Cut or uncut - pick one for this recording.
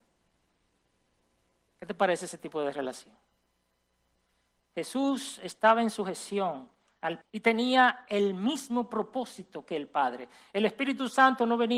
cut